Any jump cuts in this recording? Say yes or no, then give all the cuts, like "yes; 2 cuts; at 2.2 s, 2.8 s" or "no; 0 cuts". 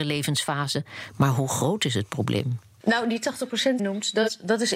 yes; 1 cut; at 3.8 s